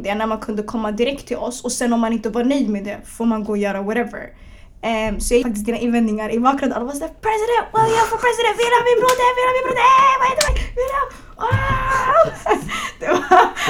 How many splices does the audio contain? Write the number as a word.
two